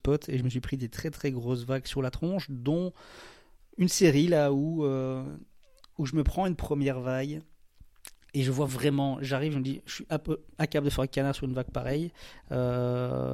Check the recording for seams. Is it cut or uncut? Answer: uncut